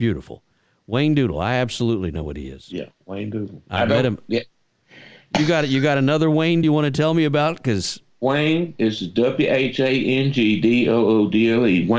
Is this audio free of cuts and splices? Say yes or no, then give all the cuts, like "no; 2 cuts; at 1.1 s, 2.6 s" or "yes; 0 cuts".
no; 1 cut; at 6.6 s